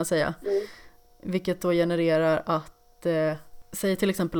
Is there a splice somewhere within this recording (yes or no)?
no